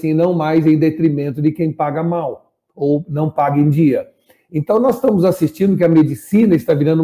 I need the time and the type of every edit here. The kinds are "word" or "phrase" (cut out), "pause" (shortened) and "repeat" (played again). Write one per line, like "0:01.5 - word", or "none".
none